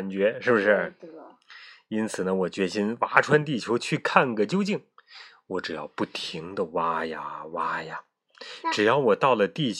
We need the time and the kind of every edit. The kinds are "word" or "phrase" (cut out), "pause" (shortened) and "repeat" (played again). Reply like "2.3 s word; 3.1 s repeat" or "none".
none